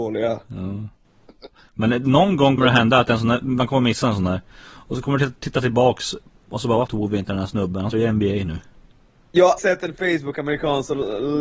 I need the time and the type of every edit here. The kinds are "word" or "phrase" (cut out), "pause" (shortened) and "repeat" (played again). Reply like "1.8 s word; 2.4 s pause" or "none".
2.6 s word; 6.9 s word; 7.9 s word; 9.6 s word